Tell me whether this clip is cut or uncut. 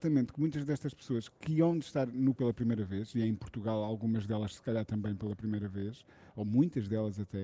cut